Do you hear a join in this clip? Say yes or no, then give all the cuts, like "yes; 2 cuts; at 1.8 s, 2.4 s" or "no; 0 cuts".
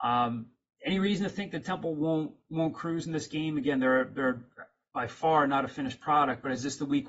no; 0 cuts